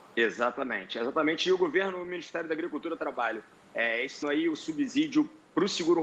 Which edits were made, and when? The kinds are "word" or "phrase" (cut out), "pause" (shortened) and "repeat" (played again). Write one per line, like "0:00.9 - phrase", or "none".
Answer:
0:03.0 - phrase
0:04.2 - word